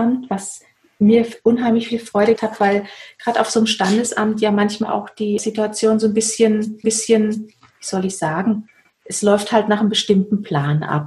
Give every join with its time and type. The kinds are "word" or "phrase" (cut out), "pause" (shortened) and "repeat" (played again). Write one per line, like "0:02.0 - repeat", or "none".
0:02.4 - word
0:06.8 - repeat